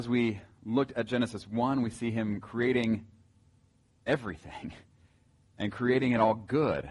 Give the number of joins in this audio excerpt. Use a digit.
0